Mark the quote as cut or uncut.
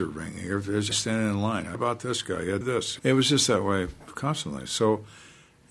cut